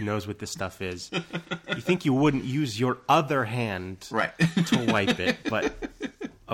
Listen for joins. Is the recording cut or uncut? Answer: uncut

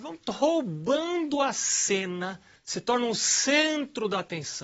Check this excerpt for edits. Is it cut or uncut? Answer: cut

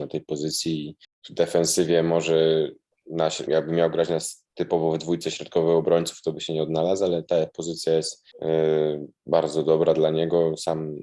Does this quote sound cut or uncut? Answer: cut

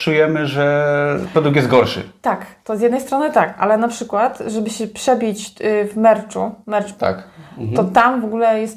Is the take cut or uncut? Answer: cut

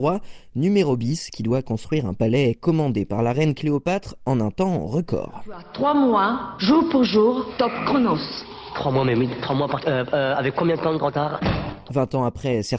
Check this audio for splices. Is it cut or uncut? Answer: uncut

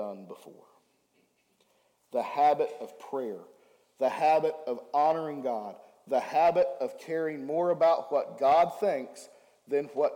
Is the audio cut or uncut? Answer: uncut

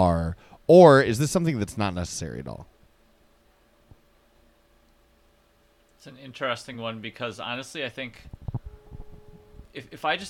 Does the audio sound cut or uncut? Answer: uncut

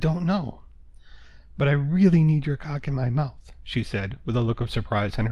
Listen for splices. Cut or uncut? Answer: uncut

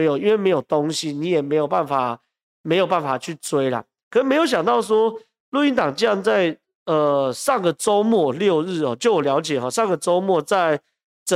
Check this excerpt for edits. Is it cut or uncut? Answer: uncut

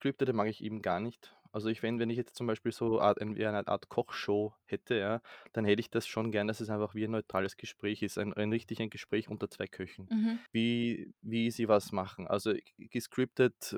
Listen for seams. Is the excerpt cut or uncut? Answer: cut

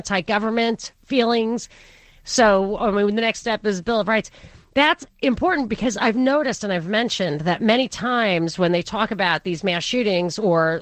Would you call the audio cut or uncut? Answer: uncut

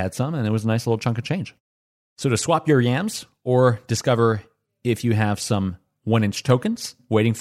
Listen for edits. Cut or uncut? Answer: uncut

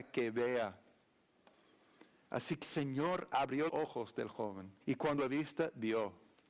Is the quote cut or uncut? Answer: cut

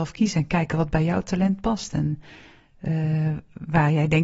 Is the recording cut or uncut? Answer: uncut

